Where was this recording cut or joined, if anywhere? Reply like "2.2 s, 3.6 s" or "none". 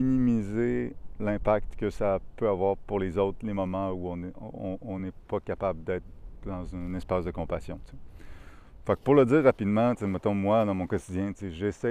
none